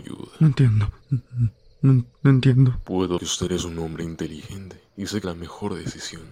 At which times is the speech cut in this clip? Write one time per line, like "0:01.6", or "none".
0:01.0
0:03.2
0:04.9
0:05.2